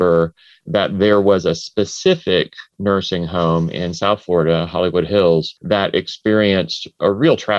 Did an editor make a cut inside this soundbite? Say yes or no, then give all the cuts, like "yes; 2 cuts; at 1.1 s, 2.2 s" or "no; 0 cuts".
yes; 1 cut; at 5.6 s